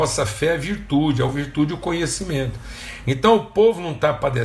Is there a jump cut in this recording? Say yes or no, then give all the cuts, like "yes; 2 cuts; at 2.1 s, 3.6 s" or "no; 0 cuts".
no; 0 cuts